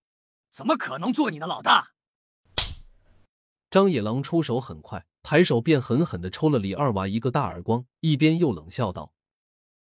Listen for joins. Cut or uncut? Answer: cut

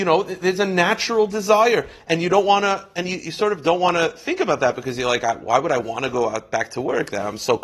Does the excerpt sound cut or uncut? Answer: uncut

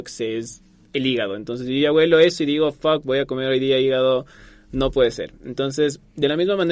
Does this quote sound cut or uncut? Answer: uncut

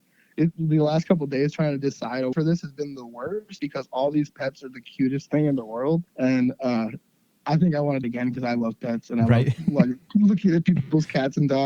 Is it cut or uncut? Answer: cut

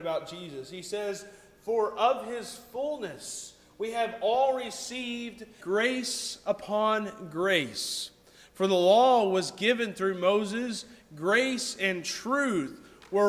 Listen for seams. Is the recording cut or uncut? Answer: cut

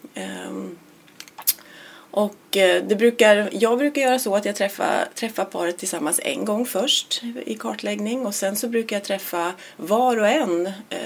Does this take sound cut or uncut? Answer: uncut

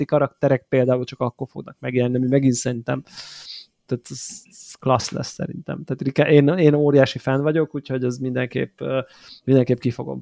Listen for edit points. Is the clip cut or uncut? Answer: uncut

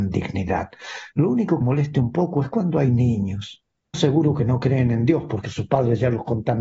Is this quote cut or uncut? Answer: cut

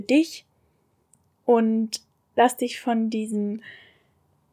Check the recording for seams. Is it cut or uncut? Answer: uncut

